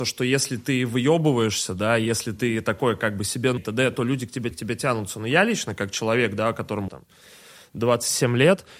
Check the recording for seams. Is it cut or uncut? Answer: cut